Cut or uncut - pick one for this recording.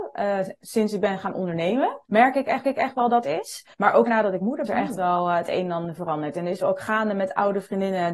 cut